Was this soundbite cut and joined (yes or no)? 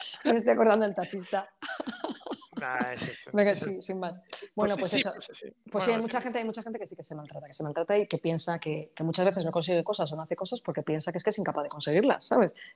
no